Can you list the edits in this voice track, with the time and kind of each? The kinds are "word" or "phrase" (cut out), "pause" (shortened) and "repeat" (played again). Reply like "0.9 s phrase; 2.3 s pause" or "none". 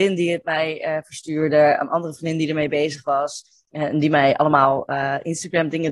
none